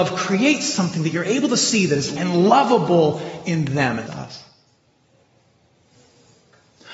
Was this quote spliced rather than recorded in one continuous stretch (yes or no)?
yes